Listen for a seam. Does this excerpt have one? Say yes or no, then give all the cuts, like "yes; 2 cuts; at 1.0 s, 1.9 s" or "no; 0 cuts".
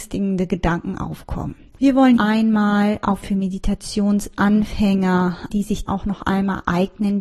yes; 4 cuts; at 2.2 s, 3.2 s, 5.5 s, 5.9 s